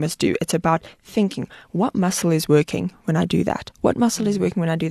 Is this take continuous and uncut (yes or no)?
yes